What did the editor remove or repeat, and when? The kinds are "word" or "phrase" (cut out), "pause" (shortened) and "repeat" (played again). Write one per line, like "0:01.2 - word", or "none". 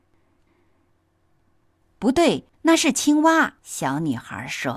0:02.5 - pause
0:03.6 - pause